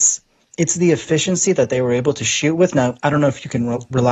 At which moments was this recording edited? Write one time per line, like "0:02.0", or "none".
none